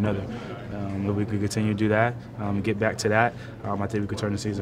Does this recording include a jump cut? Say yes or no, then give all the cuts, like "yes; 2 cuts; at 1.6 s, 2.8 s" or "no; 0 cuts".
no; 0 cuts